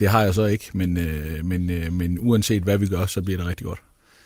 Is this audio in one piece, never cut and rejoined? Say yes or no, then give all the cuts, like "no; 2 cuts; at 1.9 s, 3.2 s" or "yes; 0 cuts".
yes; 0 cuts